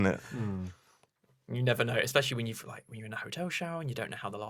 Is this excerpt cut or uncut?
uncut